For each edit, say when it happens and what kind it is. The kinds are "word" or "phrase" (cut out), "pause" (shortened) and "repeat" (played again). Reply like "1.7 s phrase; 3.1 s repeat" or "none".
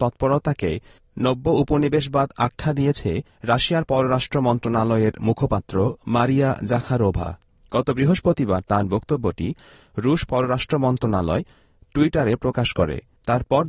none